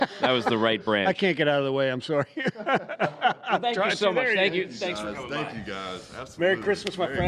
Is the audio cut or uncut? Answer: uncut